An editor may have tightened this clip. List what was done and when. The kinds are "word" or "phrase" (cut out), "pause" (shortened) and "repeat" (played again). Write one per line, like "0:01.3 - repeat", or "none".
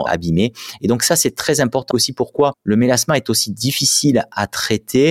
0:01.9 - phrase